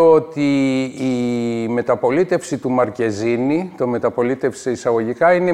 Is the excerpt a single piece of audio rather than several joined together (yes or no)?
yes